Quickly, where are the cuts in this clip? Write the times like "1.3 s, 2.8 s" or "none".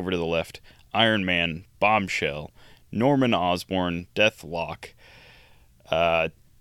none